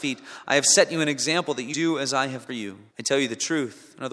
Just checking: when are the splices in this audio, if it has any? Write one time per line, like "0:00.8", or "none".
0:01.7
0:02.5
0:02.9